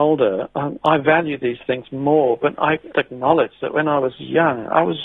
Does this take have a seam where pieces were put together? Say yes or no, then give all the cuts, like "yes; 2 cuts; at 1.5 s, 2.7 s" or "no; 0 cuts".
yes; 1 cut; at 2.9 s